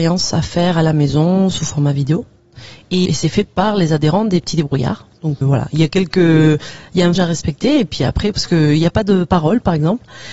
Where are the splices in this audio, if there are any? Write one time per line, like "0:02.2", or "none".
0:03.1
0:05.4
0:07.2